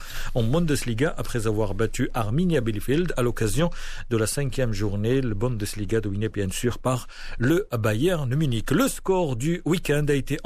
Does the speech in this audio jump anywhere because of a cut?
no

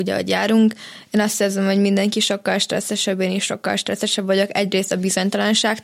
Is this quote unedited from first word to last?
yes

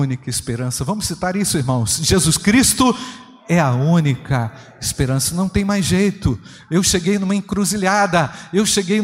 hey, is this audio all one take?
yes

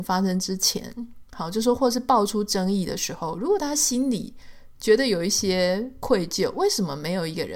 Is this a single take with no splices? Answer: no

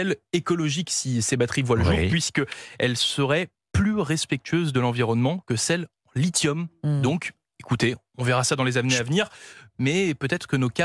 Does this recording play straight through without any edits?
yes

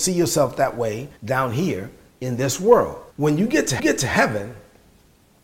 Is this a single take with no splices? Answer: no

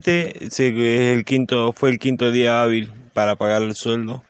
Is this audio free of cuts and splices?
no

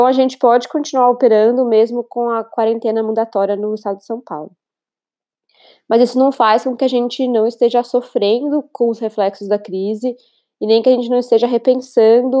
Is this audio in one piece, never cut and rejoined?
yes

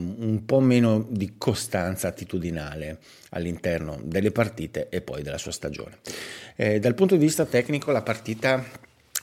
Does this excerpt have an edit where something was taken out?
no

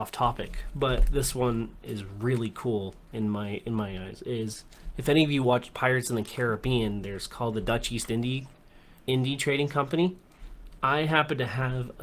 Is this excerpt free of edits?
no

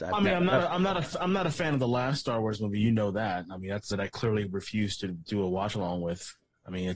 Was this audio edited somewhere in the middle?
yes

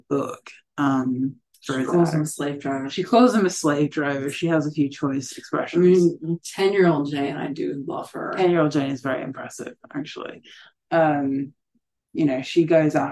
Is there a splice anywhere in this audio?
no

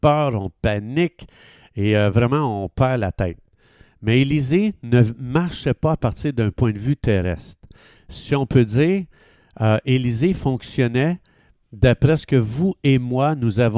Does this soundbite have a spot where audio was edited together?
no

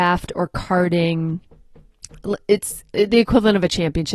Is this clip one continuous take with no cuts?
yes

